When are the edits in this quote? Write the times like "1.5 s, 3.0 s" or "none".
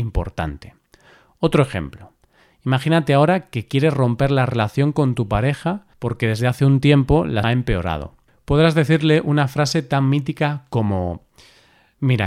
5.9 s, 7.4 s